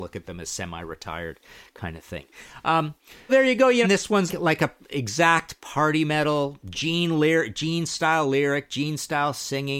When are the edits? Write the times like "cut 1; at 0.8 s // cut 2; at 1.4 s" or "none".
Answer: cut 1; at 3.3 s // cut 2; at 3.8 s // cut 3; at 4.3 s